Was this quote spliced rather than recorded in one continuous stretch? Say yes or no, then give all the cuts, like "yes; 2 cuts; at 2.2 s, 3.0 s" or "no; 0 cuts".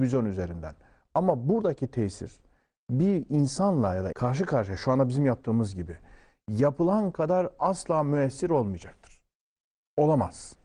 yes; 1 cut; at 4.1 s